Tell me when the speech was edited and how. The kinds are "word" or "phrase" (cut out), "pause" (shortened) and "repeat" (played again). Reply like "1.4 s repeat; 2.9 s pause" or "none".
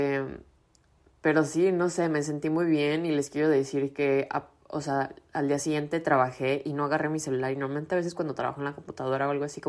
none